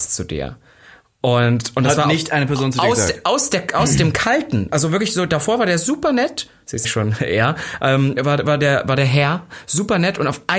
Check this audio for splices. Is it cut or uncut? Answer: cut